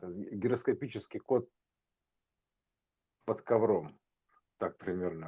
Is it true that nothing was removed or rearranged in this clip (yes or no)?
yes